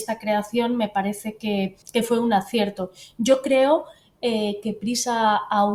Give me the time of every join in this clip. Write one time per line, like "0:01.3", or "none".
0:01.8

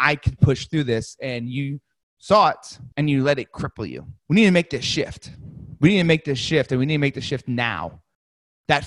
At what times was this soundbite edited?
0:02.9
0:04.2

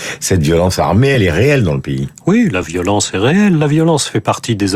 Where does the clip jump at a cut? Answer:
none

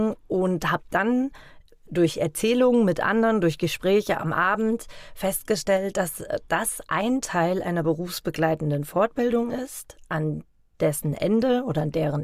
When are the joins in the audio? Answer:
none

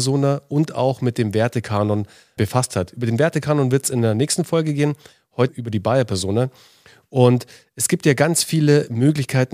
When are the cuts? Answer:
0:02.4
0:05.5

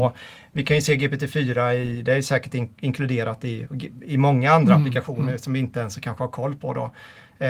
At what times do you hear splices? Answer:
none

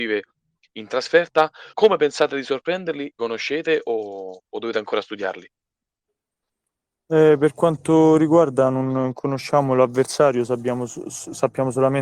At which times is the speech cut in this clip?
0:01.7
0:03.2

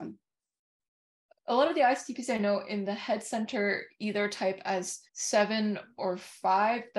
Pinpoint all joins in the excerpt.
0:05.1

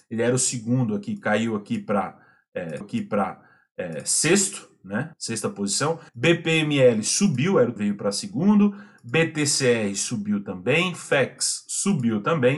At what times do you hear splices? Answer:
0:02.8
0:05.1
0:06.1
0:07.8

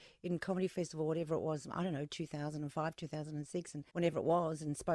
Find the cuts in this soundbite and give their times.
0:03.9

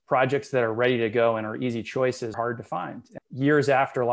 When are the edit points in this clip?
0:02.3
0:03.2

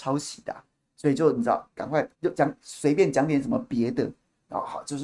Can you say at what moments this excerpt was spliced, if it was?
0:02.1

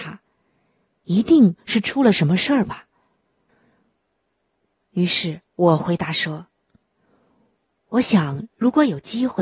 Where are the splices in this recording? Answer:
0:05.5

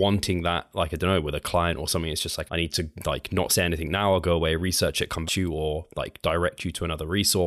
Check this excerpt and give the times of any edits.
0:02.5
0:02.9
0:05.2

